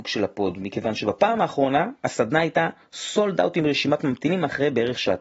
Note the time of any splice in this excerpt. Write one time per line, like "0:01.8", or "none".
none

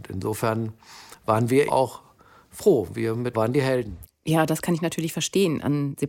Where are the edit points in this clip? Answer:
0:01.7
0:03.3

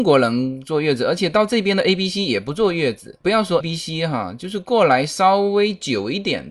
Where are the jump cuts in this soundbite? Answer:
0:03.6

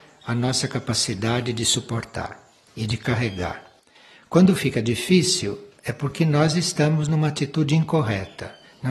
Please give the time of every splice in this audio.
none

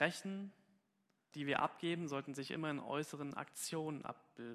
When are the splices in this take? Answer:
0:01.3

